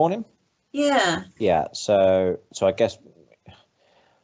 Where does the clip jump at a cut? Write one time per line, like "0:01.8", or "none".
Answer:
0:01.3
0:02.5